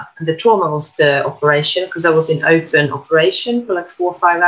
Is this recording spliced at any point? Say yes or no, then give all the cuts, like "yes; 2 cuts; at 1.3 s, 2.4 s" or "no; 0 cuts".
no; 0 cuts